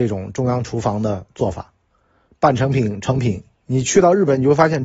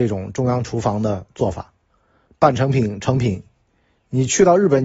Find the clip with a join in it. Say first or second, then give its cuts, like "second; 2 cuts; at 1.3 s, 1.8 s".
first; 1 cut; at 3.5 s